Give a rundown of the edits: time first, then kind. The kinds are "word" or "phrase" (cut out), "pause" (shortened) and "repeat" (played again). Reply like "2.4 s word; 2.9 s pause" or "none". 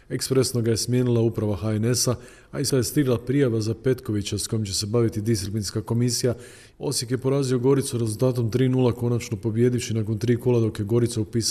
2.7 s word